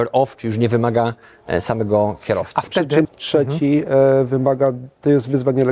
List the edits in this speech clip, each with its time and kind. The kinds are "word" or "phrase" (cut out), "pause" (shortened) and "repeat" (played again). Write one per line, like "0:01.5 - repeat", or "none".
0:03.0 - word